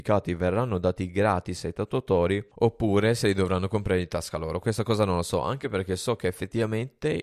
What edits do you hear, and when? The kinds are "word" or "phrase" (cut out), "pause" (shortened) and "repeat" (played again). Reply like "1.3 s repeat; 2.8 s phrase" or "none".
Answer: none